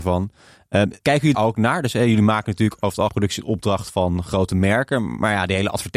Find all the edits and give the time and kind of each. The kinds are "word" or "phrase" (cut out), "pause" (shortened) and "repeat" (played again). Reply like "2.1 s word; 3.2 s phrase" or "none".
1.0 s pause; 1.3 s word; 3.1 s word